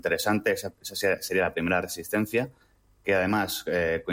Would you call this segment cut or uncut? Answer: uncut